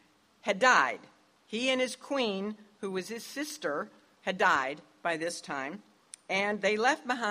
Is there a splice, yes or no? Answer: no